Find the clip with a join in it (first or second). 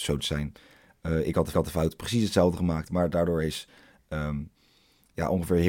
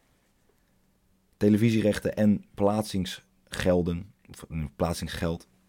first